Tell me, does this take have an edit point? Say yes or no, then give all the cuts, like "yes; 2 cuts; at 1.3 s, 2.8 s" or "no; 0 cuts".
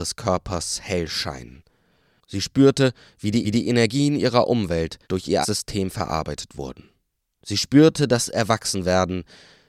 yes; 4 cuts; at 3.1 s, 3.4 s, 5.0 s, 5.4 s